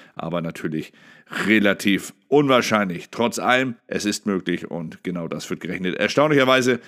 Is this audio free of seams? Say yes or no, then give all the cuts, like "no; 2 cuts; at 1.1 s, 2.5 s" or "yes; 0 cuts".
no; 1 cut; at 3.8 s